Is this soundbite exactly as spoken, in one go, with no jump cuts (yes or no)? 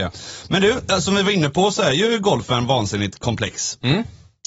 yes